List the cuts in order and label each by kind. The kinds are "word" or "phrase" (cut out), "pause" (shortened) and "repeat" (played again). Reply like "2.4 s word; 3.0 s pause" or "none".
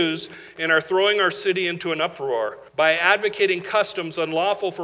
2.7 s pause